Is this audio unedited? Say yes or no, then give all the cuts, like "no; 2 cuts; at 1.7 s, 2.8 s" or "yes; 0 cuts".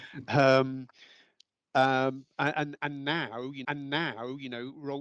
no; 1 cut; at 3.6 s